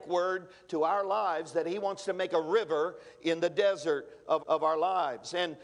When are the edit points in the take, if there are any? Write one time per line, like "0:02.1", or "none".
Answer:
0:04.4